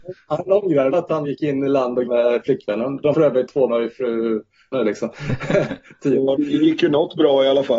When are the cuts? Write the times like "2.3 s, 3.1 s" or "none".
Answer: 0.9 s, 1.2 s, 2.1 s, 3.1 s, 3.7 s, 4.7 s, 6.4 s